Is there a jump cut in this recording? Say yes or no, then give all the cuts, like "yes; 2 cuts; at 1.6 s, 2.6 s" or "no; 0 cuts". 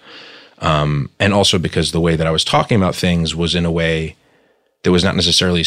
no; 0 cuts